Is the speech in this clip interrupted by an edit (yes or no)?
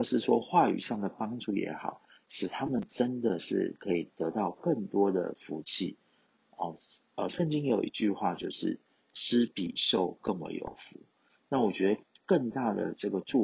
no